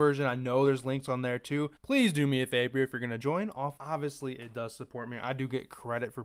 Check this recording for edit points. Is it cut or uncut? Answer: cut